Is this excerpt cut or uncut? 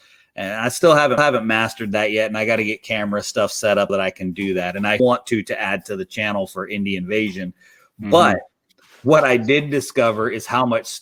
cut